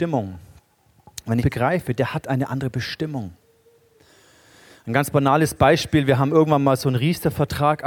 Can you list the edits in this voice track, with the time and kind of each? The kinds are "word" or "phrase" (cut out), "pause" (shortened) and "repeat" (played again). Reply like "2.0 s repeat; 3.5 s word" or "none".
1.4 s phrase; 2.0 s phrase

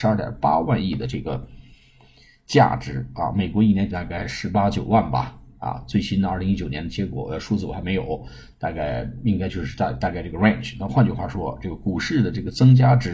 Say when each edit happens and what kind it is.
3.9 s word

